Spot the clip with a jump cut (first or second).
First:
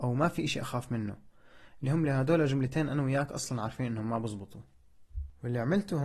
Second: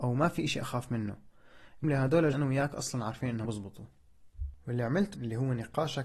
second